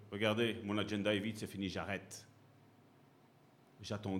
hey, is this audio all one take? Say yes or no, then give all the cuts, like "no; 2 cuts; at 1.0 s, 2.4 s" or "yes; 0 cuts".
yes; 0 cuts